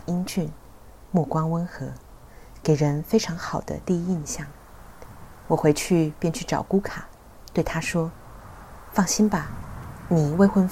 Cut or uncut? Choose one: cut